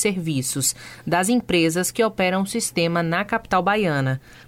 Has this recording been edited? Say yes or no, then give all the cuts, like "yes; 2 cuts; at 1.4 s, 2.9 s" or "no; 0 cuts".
no; 0 cuts